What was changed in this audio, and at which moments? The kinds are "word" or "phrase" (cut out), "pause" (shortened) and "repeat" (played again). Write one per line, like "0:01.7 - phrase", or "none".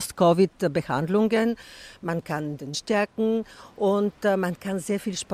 0:02.7 - word